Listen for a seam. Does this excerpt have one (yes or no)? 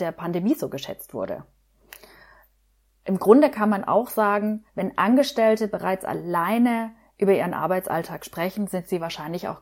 yes